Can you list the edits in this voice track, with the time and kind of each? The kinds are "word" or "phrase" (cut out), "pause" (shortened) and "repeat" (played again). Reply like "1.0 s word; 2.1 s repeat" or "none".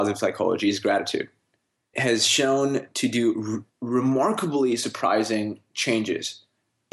1.9 s word